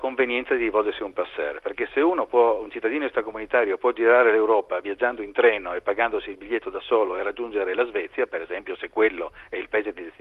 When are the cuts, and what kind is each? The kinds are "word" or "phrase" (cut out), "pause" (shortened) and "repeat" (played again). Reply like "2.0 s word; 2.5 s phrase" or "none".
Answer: none